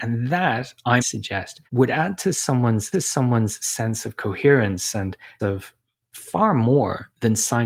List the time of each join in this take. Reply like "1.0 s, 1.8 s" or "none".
1.0 s, 1.7 s, 2.9 s, 5.4 s, 6.0 s